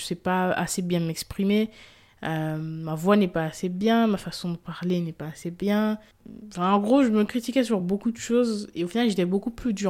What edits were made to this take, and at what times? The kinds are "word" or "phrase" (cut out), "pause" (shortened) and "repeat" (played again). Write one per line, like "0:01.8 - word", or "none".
none